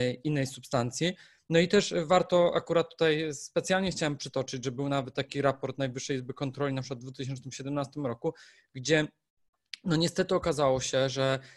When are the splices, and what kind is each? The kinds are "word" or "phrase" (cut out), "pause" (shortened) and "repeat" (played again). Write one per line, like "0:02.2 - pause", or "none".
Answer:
none